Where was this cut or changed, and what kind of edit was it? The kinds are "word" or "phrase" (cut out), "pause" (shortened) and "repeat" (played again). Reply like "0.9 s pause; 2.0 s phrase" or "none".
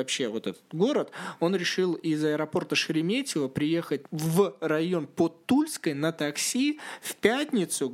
4.0 s pause